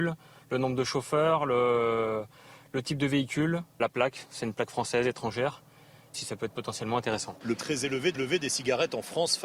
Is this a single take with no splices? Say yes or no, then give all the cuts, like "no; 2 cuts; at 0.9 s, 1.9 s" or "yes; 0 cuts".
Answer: no; 4 cuts; at 3.8 s, 6.1 s, 7.6 s, 8.1 s